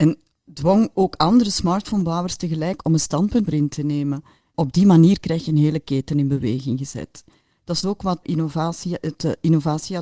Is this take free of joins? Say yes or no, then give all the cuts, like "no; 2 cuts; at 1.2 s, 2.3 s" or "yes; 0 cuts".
no; 3 cuts; at 3.5 s, 7.8 s, 8.2 s